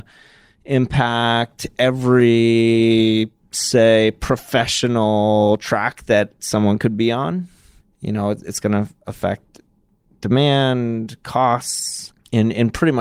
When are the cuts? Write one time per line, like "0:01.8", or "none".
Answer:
none